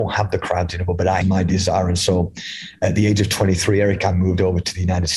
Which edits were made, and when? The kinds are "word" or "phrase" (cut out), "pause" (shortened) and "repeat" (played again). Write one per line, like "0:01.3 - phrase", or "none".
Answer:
0:01.2 - phrase